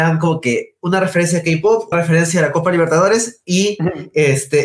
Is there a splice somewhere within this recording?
yes; 1 cut; at 1.9 s

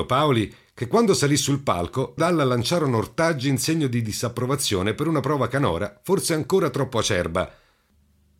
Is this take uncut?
no; 1 cut; at 2.2 s

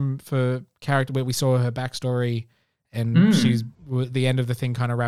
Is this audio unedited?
no; 1 cut; at 3.7 s

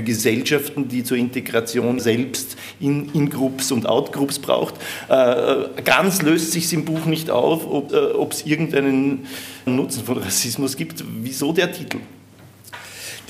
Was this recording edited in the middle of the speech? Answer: yes; 3 cuts; at 2.0 s, 7.9 s, 9.7 s

